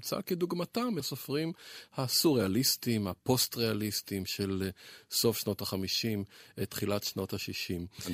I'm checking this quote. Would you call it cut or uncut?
cut